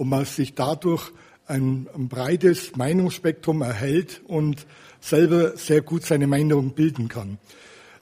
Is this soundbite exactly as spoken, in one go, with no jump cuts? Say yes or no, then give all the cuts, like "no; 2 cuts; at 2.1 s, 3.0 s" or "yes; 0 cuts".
yes; 0 cuts